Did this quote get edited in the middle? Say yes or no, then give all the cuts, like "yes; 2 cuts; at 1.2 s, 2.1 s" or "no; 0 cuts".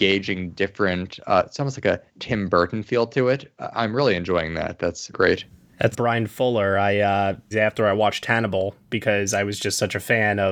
yes; 4 cuts; at 2.1 s, 5.1 s, 5.9 s, 7.5 s